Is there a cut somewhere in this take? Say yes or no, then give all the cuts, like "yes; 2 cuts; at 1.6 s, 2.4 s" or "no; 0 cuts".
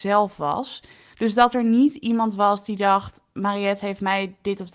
no; 0 cuts